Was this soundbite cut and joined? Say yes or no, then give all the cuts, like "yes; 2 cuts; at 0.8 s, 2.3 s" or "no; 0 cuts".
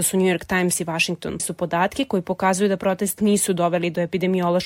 yes; 2 cuts; at 1.4 s, 3.2 s